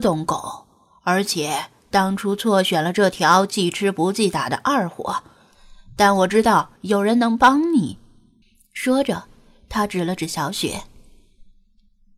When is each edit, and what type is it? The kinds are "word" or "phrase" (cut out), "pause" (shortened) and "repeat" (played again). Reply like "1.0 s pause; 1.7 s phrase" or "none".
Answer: 6.8 s pause; 8.4 s pause